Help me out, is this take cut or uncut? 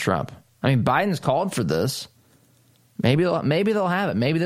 uncut